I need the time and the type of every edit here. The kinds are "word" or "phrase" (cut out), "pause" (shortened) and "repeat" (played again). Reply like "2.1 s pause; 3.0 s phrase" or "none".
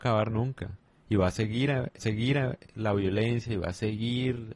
2.0 s repeat